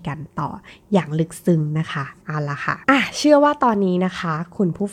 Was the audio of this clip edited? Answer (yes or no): yes